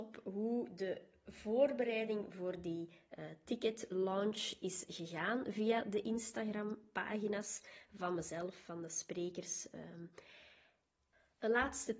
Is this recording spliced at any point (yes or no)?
no